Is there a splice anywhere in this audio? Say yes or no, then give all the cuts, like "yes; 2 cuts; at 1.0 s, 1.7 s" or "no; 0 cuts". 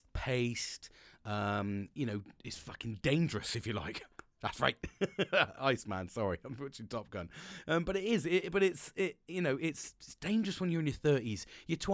no; 0 cuts